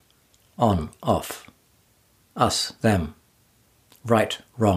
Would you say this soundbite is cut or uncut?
uncut